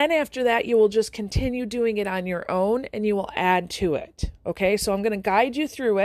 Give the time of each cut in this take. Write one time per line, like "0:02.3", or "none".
none